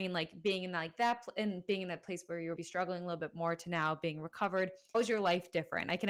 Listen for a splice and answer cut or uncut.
cut